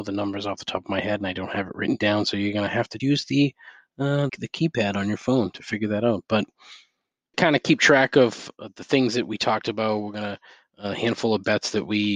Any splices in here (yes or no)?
yes